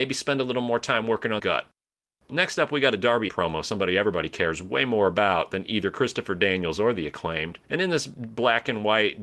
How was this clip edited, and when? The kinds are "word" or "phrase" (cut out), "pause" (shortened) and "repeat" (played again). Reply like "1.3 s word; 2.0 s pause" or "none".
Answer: 1.4 s word; 3.3 s word; 7.6 s pause